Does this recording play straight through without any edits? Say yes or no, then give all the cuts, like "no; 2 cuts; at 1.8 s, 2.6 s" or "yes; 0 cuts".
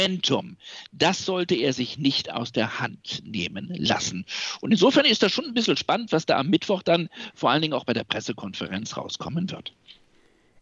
yes; 0 cuts